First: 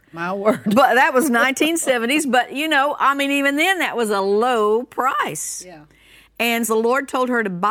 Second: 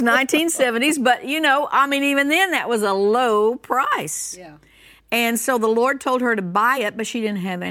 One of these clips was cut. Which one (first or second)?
first